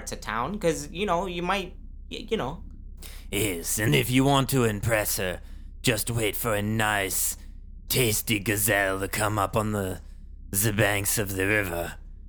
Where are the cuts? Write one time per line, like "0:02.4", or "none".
0:03.9